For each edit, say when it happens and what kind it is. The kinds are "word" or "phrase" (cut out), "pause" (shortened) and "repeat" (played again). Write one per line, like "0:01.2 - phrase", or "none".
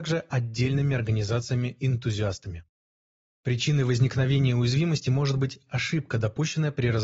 none